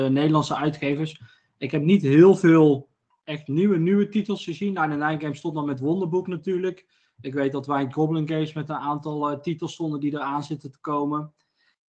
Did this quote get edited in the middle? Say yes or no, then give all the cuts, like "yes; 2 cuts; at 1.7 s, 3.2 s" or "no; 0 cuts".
no; 0 cuts